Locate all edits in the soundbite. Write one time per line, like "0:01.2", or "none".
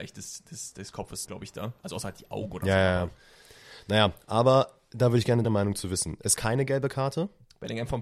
0:01.2
0:05.4
0:06.4

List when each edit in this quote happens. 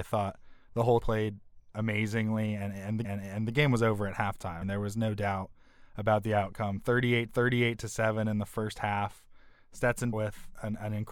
0:01.0
0:03.0
0:04.6
0:07.3
0:10.1

